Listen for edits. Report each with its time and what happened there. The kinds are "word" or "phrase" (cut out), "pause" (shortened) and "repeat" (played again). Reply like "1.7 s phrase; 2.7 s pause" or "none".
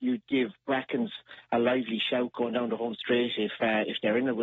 none